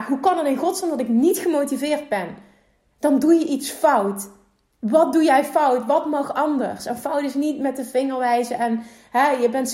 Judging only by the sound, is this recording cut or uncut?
uncut